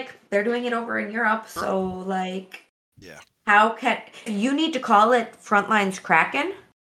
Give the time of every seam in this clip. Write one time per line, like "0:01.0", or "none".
0:04.3